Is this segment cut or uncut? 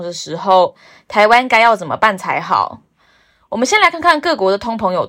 uncut